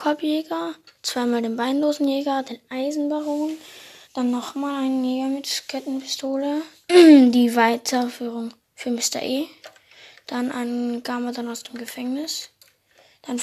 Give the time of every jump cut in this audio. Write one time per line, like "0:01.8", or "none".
0:04.0
0:08.6